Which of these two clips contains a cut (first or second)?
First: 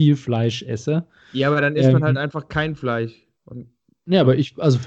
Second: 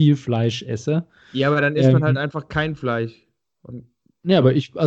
first